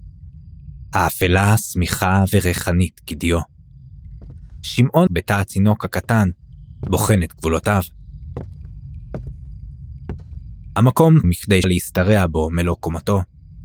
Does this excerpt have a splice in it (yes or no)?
yes